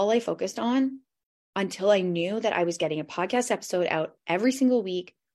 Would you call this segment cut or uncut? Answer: uncut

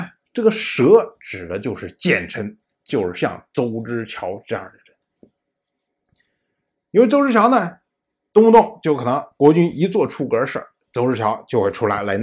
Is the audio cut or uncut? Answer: uncut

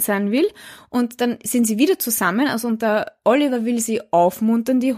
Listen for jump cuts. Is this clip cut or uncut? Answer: uncut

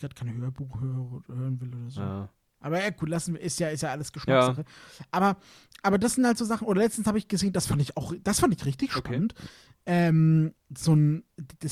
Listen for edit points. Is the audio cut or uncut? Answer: uncut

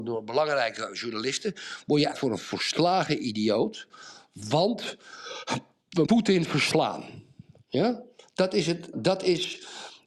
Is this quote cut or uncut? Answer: cut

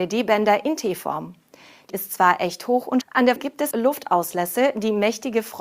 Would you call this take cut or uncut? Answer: cut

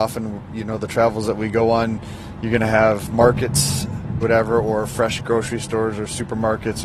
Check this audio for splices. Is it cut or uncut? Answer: cut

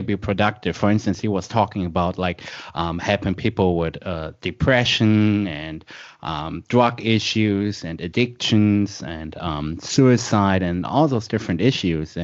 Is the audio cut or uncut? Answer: uncut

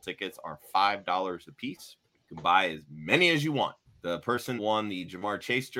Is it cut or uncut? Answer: cut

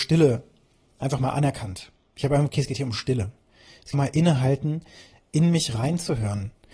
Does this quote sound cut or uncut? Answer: cut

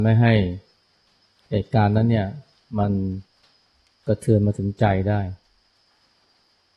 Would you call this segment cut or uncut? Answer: uncut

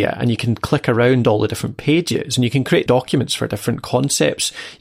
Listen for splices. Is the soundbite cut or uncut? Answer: cut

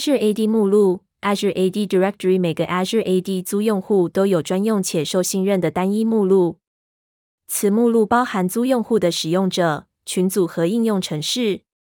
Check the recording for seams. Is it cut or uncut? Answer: uncut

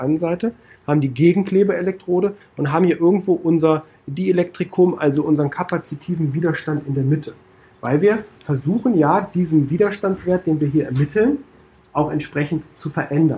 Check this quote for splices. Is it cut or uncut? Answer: uncut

